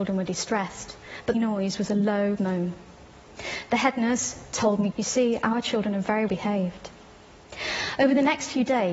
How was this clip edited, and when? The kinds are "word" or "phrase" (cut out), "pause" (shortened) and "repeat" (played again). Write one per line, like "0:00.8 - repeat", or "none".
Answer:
0:01.3 - phrase
0:02.4 - word
0:04.9 - word
0:06.3 - word